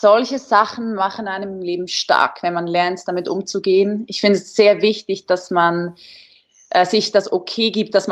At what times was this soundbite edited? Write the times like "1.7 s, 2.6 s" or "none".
none